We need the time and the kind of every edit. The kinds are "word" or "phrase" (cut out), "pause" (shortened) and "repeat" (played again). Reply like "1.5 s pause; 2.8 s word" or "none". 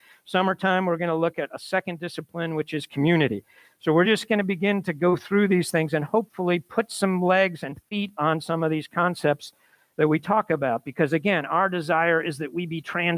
none

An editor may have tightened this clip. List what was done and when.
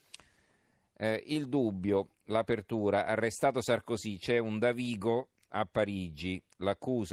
none

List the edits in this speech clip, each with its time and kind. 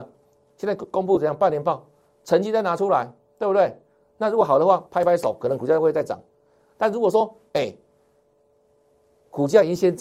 none

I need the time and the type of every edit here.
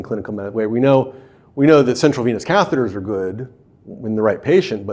none

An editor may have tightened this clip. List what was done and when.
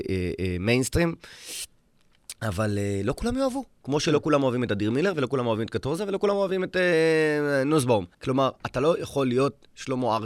8.1 s pause

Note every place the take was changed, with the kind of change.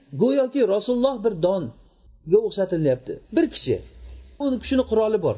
3.2 s pause; 4.4 s word

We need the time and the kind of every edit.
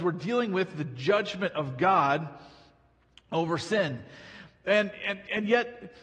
none

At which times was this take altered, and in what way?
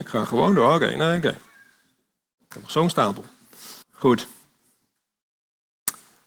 3.8 s pause

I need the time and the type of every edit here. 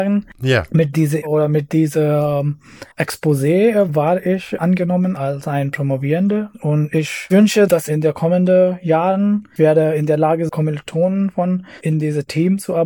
1.2 s word; 2.9 s pause; 9.6 s word; 10.5 s phrase

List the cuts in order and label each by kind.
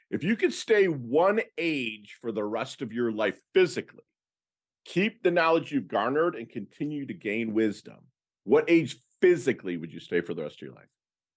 none

